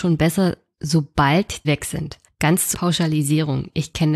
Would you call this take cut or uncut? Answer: cut